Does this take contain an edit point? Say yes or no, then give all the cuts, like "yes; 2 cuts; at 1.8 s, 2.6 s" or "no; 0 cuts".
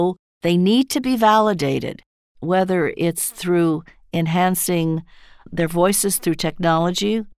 no; 0 cuts